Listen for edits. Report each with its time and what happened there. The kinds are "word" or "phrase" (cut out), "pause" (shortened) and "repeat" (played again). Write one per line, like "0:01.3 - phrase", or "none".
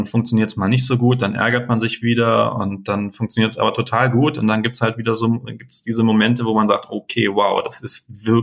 none